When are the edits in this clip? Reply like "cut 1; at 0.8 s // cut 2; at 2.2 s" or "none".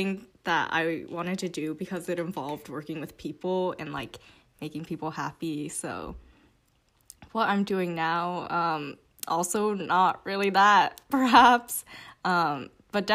none